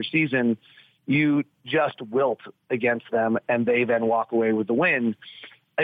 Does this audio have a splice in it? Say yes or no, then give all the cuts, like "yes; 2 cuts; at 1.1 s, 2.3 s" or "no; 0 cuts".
no; 0 cuts